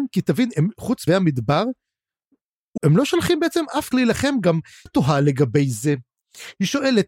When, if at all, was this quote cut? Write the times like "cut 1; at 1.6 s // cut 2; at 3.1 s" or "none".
cut 1; at 1.1 s // cut 2; at 2.8 s // cut 3; at 3.9 s // cut 4; at 4.9 s